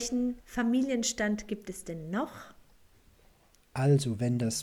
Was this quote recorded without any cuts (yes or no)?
yes